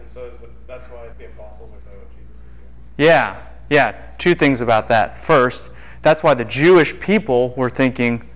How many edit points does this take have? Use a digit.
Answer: 2